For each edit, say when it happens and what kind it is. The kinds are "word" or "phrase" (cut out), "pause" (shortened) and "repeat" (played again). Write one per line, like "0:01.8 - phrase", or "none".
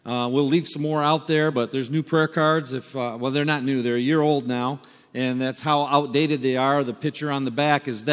none